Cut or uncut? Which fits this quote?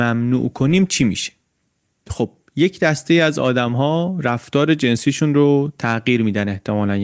uncut